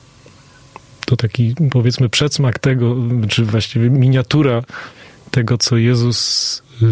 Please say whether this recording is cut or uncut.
uncut